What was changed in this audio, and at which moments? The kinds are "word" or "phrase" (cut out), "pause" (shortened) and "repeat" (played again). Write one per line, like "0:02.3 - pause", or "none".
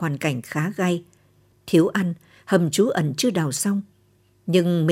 none